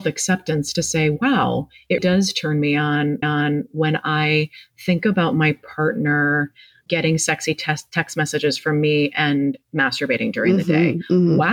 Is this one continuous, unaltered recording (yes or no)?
no